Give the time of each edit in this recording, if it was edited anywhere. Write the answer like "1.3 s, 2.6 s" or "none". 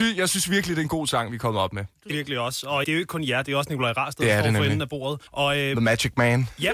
2.1 s, 2.8 s, 5.3 s